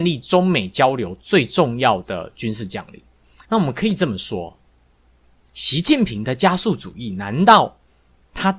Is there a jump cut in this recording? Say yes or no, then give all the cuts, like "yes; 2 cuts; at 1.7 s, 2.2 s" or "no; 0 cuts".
yes; 1 cut; at 3.4 s